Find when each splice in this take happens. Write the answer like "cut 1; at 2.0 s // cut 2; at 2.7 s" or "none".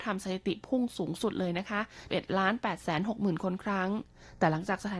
cut 1; at 2.1 s

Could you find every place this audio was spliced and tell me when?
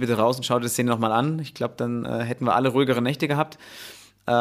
none

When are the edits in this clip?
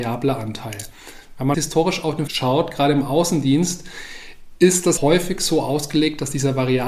cut 1; at 1.5 s // cut 2; at 2.3 s // cut 3; at 5.0 s

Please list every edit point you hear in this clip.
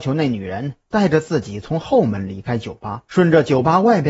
cut 1; at 3.1 s

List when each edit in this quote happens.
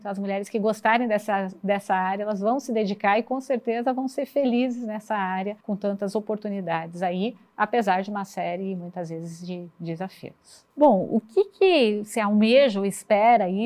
cut 1; at 5.6 s // cut 2; at 10.7 s

